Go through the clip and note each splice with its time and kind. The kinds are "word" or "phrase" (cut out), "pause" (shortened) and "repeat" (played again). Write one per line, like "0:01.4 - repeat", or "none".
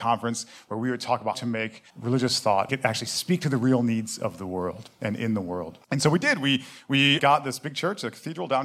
0:01.3 - word
0:01.9 - pause
0:02.7 - word
0:05.8 - pause
0:07.2 - word